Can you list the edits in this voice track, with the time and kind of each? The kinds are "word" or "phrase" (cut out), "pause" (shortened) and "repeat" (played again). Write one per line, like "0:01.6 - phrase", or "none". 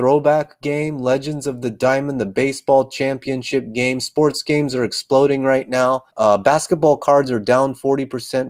0:06.1 - pause